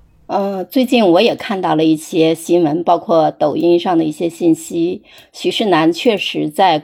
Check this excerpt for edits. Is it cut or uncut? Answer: uncut